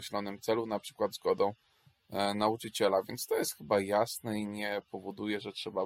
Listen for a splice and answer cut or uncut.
uncut